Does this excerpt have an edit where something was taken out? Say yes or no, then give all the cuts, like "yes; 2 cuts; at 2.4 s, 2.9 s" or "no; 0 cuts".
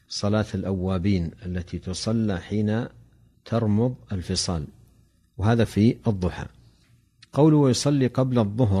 yes; 1 cut; at 5.6 s